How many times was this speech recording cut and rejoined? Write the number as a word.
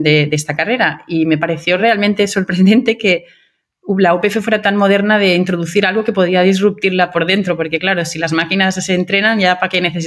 zero